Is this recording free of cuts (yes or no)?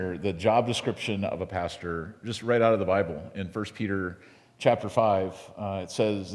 yes